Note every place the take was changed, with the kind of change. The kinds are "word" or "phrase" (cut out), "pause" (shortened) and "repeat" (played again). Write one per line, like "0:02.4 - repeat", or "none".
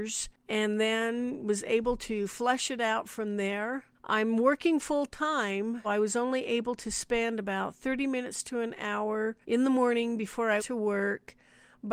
0:03.9 - pause
0:05.8 - word
0:09.4 - pause
0:10.6 - word

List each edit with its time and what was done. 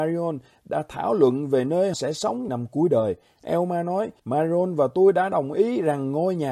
0:01.9 - word
0:02.5 - word
0:04.2 - pause

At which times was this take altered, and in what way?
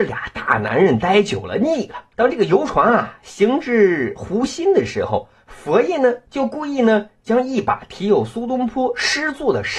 0:02.1 - pause

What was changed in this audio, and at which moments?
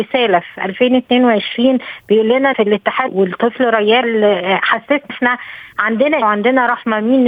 0:02.5 - word
0:03.1 - word
0:04.0 - word
0:05.1 - word
0:06.2 - word

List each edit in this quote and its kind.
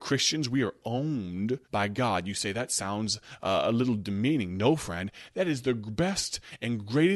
0:01.6 - pause

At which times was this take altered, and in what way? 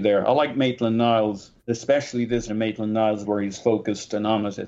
0:01.6 - pause
0:02.5 - word
0:03.2 - phrase

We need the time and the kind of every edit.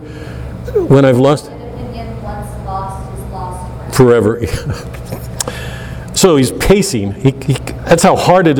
none

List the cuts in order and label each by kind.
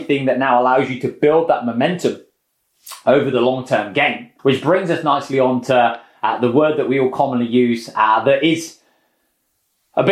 0:04.4 - pause

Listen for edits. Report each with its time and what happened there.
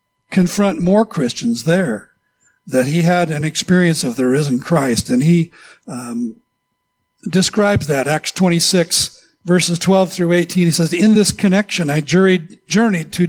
none

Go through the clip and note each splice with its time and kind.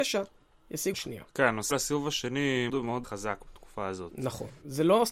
0:00.9 - word
0:01.7 - word
0:02.7 - word
0:03.0 - word

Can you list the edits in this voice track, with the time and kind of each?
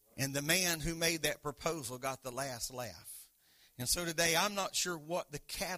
none

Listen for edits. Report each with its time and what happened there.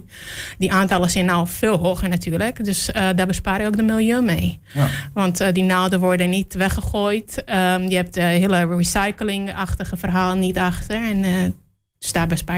none

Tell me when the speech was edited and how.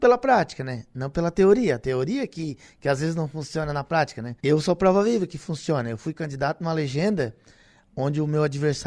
0:04.4 - pause

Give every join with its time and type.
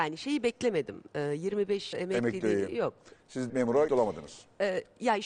0:01.9 - word
0:03.5 - word
0:03.9 - word

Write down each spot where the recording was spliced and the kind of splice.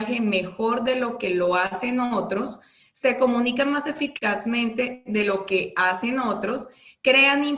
none

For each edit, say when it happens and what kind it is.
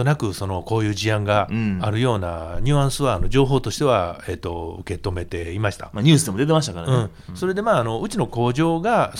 none

